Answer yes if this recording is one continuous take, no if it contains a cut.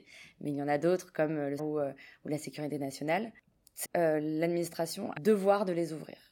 no